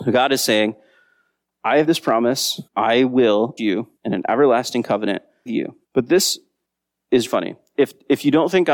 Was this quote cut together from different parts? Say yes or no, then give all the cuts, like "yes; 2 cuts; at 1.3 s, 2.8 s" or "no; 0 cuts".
yes; 7 cuts; at 1.9 s, 2.7 s, 3.6 s, 4.0 s, 5.5 s, 5.8 s, 7.3 s